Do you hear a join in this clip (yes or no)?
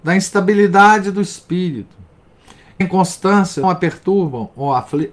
yes